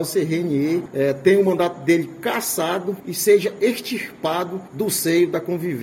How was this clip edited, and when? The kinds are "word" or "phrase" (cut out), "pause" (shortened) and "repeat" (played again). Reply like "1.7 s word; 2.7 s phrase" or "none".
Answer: none